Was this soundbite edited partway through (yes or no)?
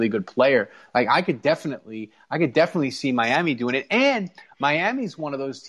no